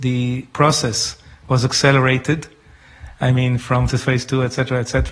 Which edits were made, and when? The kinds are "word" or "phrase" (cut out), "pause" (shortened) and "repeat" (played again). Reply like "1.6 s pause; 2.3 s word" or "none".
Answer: 3.9 s phrase